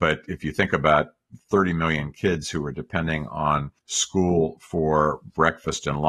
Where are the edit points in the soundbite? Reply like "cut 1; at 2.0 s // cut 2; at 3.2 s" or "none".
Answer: cut 1; at 3.8 s